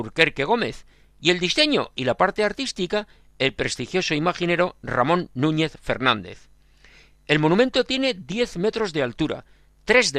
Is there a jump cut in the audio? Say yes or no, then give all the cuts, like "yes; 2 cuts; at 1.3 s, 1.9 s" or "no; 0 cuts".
no; 0 cuts